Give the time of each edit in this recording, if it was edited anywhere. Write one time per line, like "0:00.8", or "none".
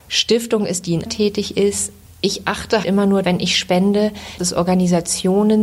0:01.1
0:02.8
0:03.2
0:04.4